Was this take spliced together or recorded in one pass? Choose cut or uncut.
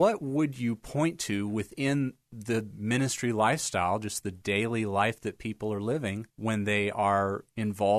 cut